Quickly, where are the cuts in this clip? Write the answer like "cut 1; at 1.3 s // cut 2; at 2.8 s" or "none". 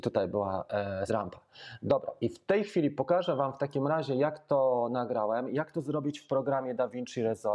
cut 1; at 1.1 s